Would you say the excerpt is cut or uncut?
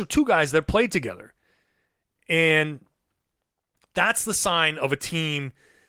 uncut